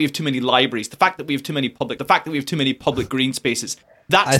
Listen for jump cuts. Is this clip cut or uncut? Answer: cut